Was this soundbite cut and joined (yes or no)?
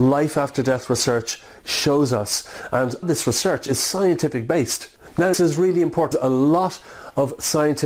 yes